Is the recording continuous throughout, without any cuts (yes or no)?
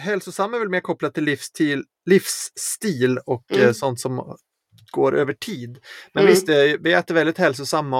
yes